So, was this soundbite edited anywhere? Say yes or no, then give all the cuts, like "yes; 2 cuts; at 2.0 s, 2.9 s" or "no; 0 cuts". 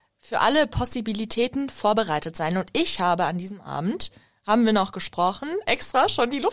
no; 0 cuts